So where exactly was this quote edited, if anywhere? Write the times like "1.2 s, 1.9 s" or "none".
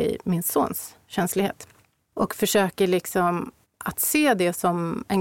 1.8 s, 3.6 s